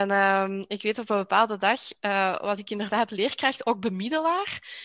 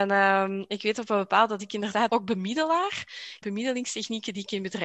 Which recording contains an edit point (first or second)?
second